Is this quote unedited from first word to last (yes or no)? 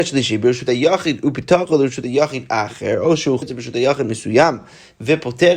no